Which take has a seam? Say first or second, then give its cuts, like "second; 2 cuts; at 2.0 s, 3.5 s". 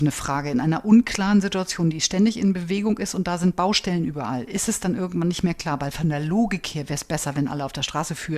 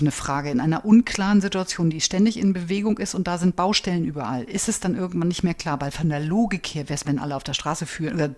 second; 1 cut; at 7.0 s